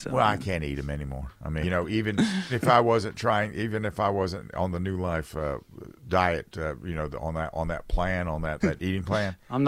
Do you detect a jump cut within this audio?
yes; 4 cuts; at 1.6 s, 2.5 s, 6.0 s, 8.6 s

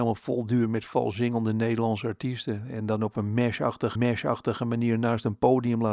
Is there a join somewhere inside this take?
yes; 1 cut; at 3.9 s

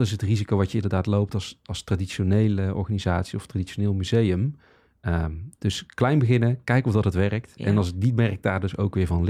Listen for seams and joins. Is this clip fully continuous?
yes; 0 cuts

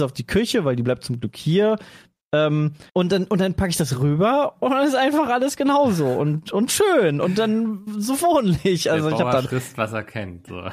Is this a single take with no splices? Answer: no; 1 cut; at 2.9 s

